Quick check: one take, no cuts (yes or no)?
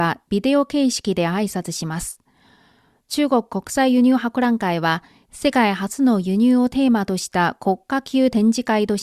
yes